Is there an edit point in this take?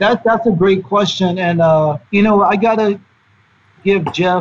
yes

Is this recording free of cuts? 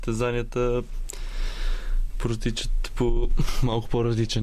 yes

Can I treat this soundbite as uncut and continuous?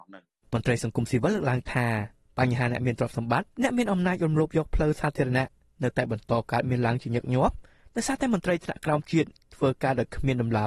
yes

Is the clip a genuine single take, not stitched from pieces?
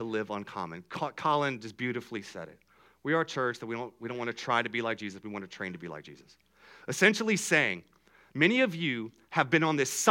yes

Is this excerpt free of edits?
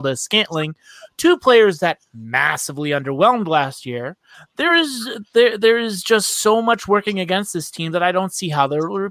yes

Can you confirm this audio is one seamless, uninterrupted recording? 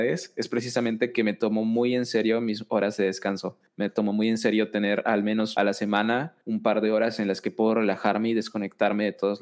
no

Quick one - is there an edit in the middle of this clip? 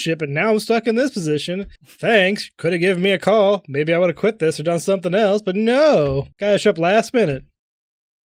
yes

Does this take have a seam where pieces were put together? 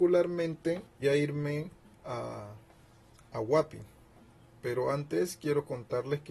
yes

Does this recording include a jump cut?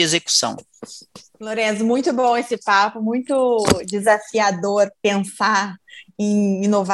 no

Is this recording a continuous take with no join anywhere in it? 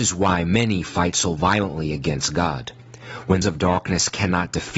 no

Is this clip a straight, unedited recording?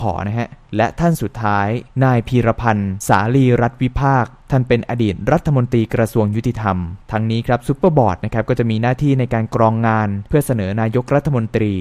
no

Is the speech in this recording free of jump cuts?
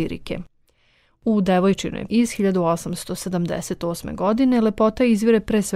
no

